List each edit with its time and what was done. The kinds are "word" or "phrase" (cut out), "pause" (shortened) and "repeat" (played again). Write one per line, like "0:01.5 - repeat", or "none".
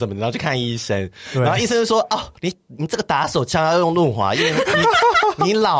0:02.4 - pause